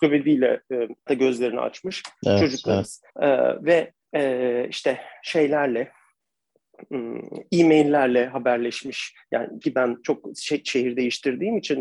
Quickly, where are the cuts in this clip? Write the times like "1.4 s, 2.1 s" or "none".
1.1 s, 3.1 s, 4.0 s, 9.6 s